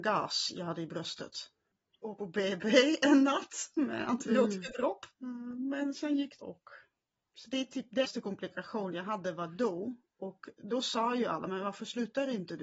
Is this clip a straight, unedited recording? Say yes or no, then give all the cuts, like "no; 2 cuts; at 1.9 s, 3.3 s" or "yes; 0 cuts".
no; 4 cuts; at 2.2 s, 5.1 s, 6.4 s, 8.0 s